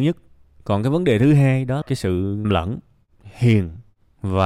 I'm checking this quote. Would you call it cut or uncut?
cut